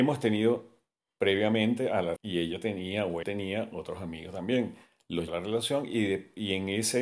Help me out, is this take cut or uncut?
cut